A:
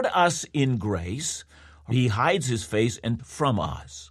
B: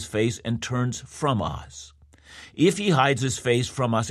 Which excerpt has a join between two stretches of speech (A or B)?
A